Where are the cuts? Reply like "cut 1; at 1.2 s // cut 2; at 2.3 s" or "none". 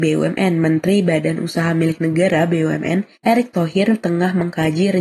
cut 1; at 3.1 s